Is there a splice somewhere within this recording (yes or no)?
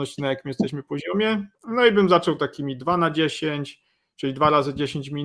no